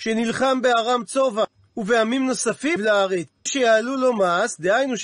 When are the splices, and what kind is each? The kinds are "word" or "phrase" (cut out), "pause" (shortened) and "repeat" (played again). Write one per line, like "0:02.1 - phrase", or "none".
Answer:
0:02.8 - word
0:03.5 - word